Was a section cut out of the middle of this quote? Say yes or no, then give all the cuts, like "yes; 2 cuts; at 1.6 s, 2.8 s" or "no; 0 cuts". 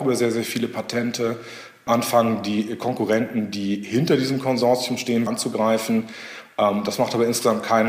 yes; 1 cut; at 5.3 s